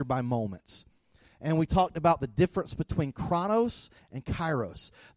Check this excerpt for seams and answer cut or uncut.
uncut